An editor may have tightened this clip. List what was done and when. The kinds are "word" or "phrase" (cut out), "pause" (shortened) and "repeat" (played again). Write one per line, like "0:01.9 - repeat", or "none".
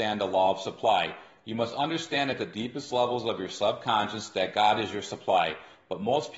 none